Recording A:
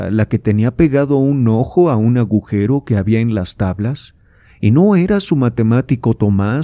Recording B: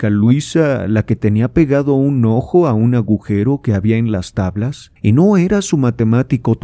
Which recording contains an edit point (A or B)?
B